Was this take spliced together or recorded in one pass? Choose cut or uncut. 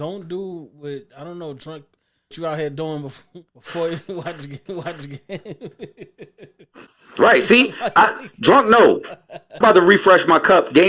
cut